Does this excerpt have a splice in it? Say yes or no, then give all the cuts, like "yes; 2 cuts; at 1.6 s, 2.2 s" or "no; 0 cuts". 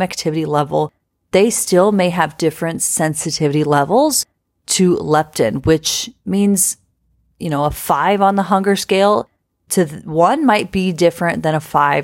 no; 0 cuts